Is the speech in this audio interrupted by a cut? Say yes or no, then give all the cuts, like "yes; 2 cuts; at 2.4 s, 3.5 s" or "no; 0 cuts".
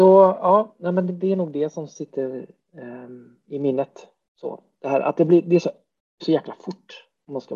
yes; 2 cuts; at 1.1 s, 6.2 s